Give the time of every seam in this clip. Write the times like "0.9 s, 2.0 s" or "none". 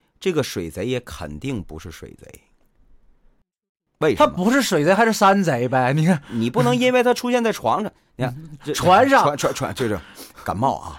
none